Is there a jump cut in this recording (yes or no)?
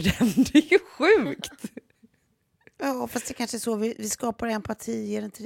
no